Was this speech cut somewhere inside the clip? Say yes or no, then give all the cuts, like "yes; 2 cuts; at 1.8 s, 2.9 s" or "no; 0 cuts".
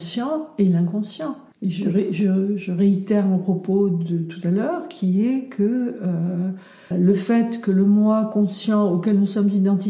yes; 2 cuts; at 1.5 s, 6.9 s